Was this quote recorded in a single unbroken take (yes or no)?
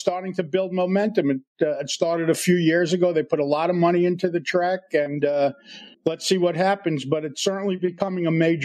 no